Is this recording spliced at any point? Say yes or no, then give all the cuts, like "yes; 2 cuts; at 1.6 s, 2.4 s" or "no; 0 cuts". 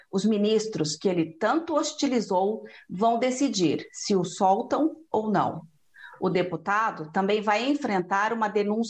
no; 0 cuts